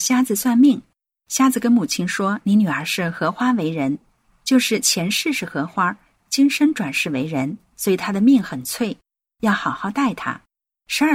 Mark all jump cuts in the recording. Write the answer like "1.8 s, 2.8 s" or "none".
none